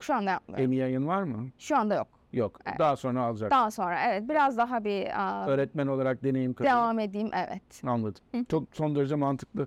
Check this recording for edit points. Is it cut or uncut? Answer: uncut